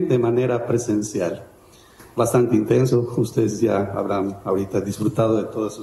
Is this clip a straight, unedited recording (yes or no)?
yes